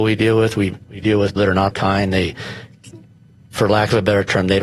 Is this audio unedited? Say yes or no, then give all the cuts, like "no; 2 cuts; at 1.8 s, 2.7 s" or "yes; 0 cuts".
no; 3 cuts; at 1.4 s, 1.7 s, 3.3 s